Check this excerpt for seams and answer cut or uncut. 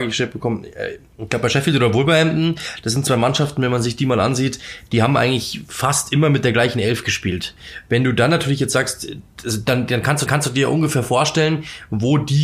cut